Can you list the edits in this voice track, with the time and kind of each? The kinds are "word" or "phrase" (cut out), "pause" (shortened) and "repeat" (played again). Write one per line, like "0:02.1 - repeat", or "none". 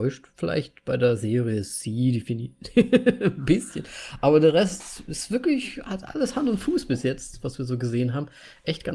none